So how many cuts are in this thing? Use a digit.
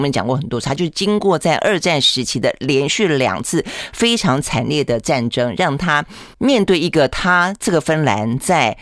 1